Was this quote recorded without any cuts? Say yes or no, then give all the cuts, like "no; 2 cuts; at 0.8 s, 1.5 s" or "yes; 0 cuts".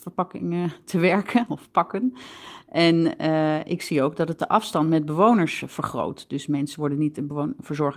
yes; 0 cuts